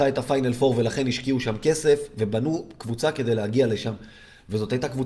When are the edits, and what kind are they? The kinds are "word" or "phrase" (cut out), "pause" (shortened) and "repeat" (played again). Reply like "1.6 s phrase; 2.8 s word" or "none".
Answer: none